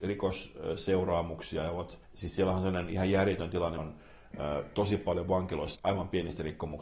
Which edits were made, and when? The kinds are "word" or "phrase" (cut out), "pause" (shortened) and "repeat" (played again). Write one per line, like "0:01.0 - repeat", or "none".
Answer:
0:02.0 - pause
0:03.8 - word
0:05.7 - phrase